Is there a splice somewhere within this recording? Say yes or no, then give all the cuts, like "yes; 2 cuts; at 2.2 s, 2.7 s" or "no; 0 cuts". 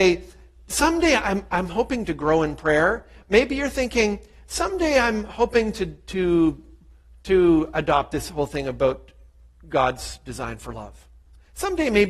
no; 0 cuts